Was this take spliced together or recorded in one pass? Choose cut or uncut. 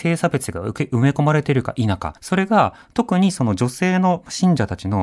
cut